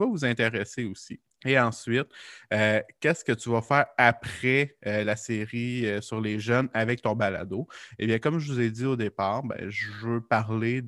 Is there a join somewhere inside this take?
yes; 1 cut; at 1.3 s

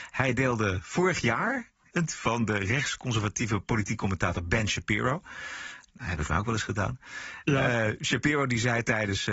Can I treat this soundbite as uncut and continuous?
no; 2 cuts; at 2.1 s, 6.3 s

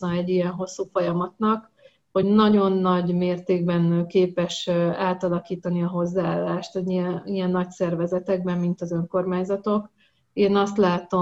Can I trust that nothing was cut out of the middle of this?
yes; 0 cuts

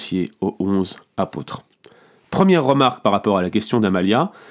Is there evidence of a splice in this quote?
no; 0 cuts

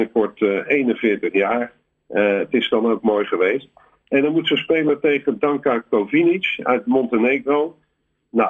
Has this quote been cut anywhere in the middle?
no; 0 cuts

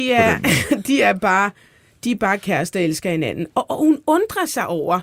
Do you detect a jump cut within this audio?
no; 0 cuts

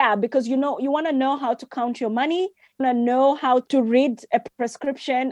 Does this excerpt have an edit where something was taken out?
yes; 2 cuts; at 2.8 s, 3.7 s

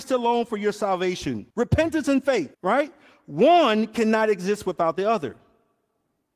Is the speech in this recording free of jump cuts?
no; 2 cuts; at 1.5 s, 2.5 s

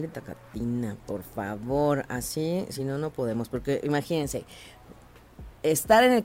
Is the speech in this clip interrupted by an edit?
no; 0 cuts

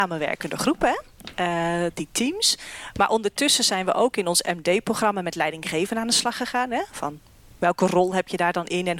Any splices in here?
no; 0 cuts

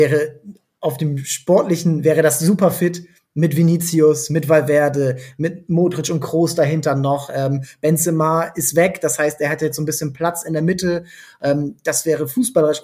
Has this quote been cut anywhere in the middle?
no; 0 cuts

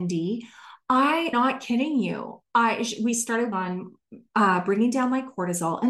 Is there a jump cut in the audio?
yes; 2 cuts; at 1.3 s, 3.5 s

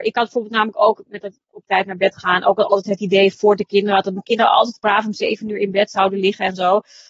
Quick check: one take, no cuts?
yes; 0 cuts

